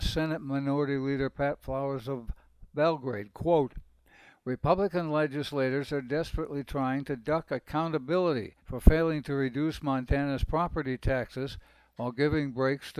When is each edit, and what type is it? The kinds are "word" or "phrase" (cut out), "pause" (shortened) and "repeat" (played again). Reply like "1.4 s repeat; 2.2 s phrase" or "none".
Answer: 8.6 s pause